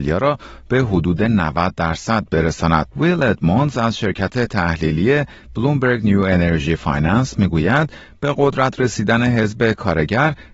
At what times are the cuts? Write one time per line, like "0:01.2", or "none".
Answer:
0:02.9